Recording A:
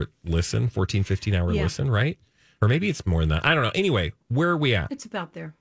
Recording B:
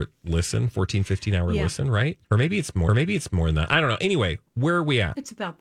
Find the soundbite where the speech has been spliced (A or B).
B